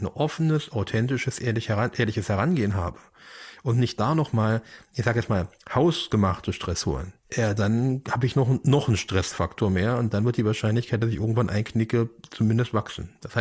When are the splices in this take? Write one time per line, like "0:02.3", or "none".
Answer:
0:07.2

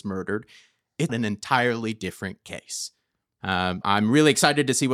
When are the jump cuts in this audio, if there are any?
0:01.1
0:03.8

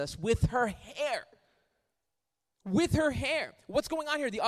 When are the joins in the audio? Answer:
none

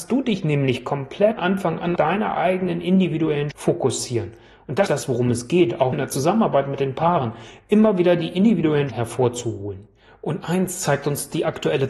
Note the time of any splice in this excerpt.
0:01.4
0:02.0
0:03.5
0:04.9
0:05.9
0:08.9

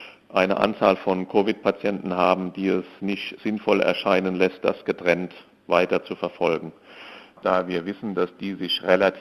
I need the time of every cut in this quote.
none

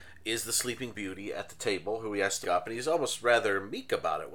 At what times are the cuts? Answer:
0:02.4

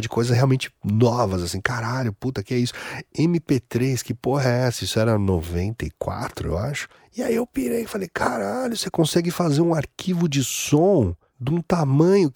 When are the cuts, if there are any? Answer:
none

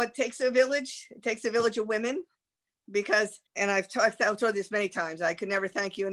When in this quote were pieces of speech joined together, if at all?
0:03.5

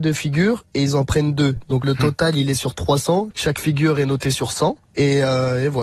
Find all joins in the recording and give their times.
0:01.8

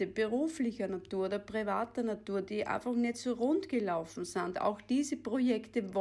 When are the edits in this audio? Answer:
none

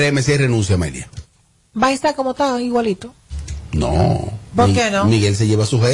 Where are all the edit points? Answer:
none

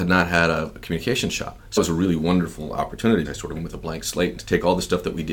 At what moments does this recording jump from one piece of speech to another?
0:01.8
0:03.2
0:03.6
0:04.4

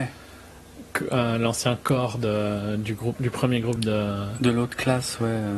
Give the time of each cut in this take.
none

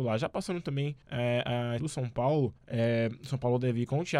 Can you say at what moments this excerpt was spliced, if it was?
0:01.0
0:01.8
0:02.6

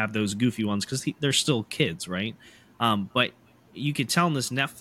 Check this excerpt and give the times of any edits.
none

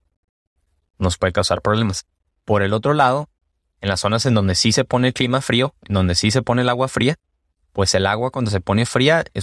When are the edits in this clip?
none

